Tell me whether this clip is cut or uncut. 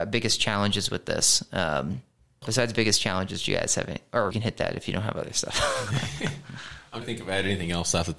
cut